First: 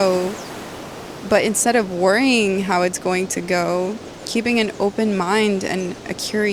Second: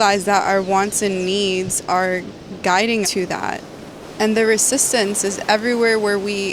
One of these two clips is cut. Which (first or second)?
second